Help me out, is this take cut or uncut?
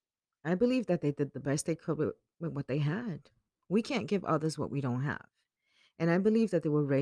uncut